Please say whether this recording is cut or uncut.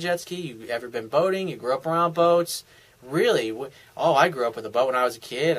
uncut